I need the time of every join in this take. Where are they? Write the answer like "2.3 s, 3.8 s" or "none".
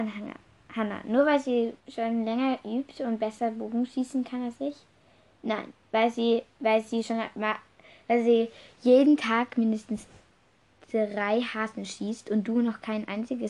1.8 s